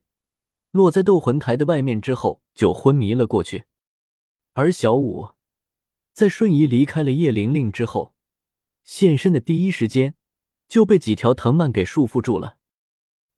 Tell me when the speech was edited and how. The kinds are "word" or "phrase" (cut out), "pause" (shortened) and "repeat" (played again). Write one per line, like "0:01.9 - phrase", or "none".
0:02.5 - pause